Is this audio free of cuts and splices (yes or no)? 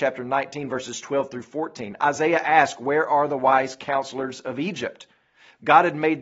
yes